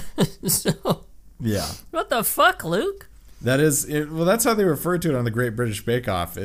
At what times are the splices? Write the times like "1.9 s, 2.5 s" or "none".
none